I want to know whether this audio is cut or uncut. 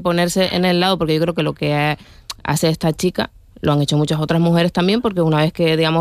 uncut